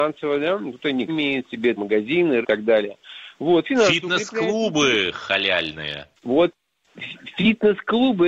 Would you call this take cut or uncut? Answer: cut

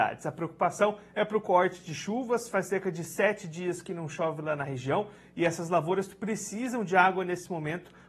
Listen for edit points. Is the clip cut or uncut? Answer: uncut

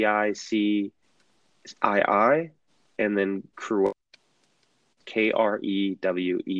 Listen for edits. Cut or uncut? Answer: uncut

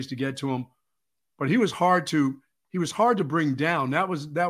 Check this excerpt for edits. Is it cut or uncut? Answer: uncut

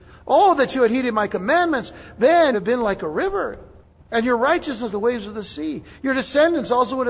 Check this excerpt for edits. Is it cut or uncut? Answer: cut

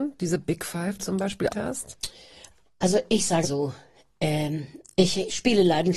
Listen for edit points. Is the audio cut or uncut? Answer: cut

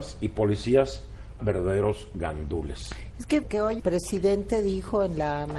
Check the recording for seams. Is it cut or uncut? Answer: cut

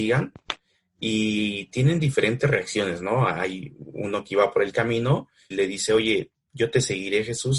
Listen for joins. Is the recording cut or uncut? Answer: cut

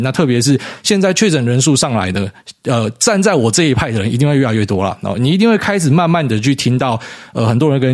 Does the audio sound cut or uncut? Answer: uncut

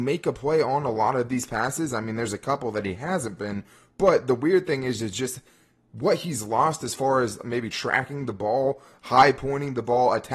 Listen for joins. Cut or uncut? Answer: uncut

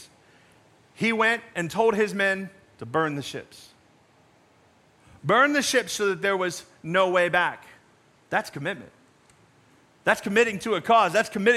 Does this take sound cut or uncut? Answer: uncut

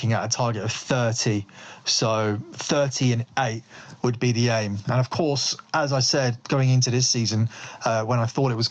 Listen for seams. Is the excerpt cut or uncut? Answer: uncut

